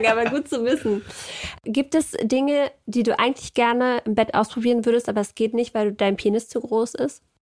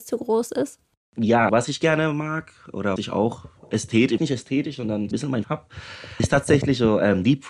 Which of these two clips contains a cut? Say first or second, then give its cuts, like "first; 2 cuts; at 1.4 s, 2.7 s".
second; 6 cuts; at 1.5 s, 3.0 s, 4.2 s, 5.1 s, 5.4 s, 6.2 s